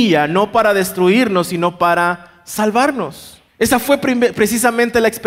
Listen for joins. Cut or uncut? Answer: cut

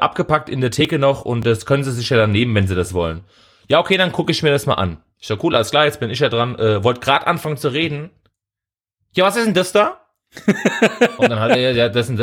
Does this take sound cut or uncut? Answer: uncut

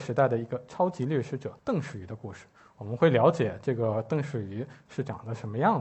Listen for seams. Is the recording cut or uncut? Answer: cut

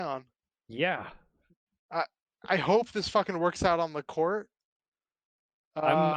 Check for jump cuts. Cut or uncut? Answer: uncut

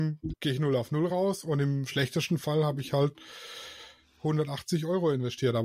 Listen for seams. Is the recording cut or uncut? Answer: uncut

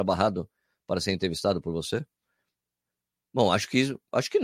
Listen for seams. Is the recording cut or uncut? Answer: uncut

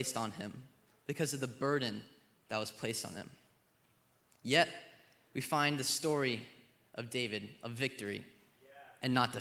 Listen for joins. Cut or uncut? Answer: uncut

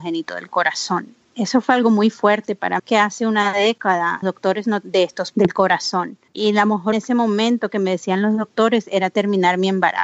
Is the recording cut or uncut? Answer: cut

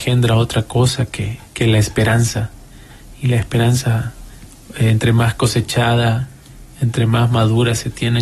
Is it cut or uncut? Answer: cut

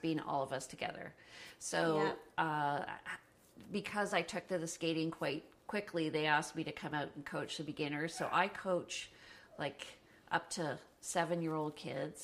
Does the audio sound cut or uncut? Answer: uncut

